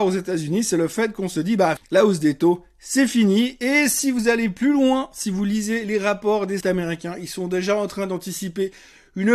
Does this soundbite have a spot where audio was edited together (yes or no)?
yes